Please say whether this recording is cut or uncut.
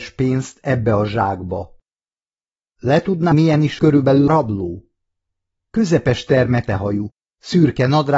cut